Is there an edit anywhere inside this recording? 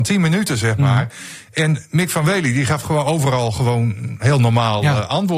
no; 0 cuts

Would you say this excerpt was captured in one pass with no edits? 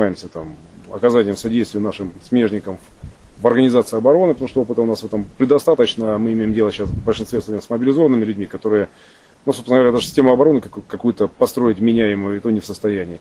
yes; 0 cuts

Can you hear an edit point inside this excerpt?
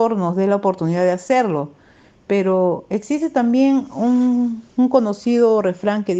no; 0 cuts

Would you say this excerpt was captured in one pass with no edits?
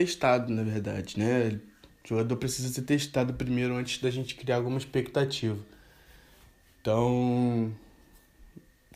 yes; 0 cuts

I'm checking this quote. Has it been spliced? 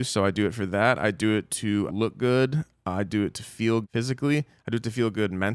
yes; 2 cuts; at 1.9 s, 3.8 s

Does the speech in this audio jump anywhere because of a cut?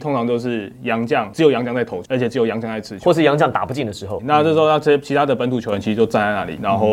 yes; 1 cut; at 4.2 s

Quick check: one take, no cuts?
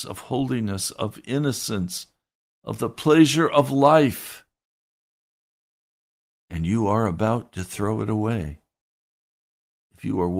no; 1 cut; at 2.4 s

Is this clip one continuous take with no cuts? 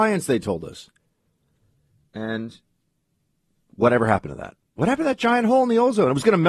yes; 0 cuts

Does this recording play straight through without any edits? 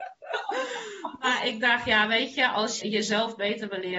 no; 1 cut; at 2.8 s

